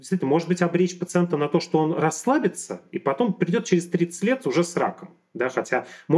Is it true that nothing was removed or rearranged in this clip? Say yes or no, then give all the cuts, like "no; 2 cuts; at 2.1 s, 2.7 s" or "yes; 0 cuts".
yes; 0 cuts